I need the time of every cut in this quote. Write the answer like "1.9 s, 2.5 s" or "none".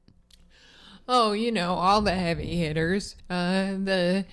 3.2 s